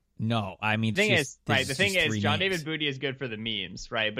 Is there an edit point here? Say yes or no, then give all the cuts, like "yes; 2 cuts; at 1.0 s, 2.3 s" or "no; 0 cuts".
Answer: yes; 1 cut; at 0.9 s